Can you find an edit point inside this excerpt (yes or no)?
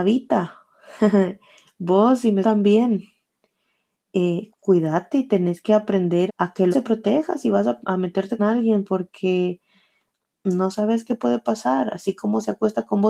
yes